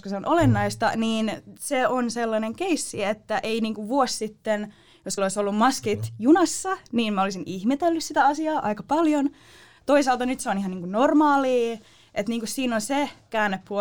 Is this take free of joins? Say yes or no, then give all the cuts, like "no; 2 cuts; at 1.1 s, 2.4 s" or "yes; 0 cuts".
no; 1 cut; at 5.2 s